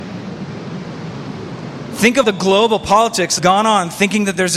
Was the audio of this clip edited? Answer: yes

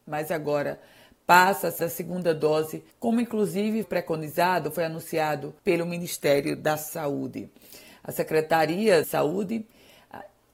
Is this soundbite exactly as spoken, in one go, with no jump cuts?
no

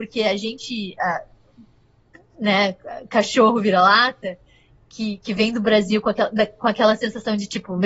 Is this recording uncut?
yes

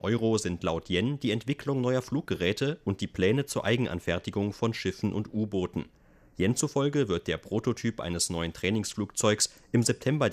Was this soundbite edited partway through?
no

